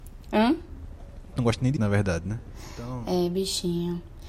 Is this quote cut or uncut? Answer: cut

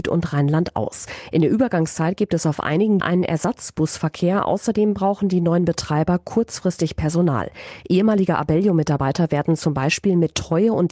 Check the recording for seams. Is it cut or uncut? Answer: cut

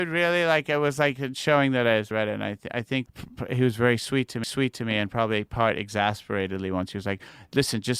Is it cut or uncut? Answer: cut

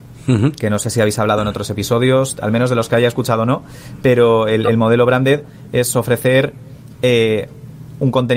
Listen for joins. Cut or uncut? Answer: uncut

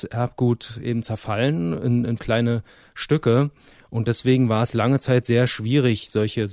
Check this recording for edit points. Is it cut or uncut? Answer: cut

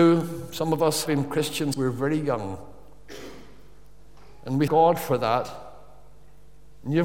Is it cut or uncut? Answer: cut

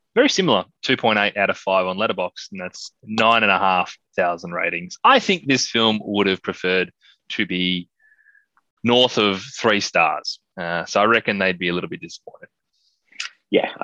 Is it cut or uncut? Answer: uncut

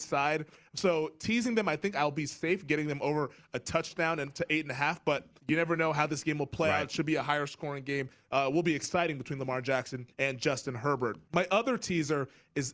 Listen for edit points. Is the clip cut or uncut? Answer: cut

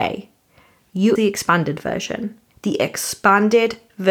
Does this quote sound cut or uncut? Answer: cut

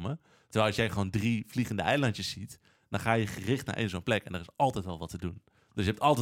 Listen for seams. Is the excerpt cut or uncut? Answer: uncut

